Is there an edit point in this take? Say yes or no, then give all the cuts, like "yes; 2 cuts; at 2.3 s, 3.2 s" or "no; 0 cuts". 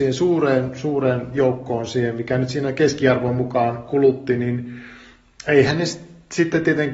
no; 0 cuts